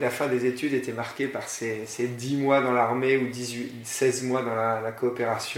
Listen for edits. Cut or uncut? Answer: uncut